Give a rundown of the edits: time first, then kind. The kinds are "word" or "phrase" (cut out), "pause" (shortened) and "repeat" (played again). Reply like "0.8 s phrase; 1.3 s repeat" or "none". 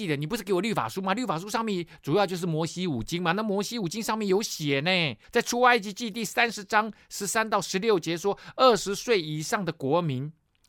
5.2 s pause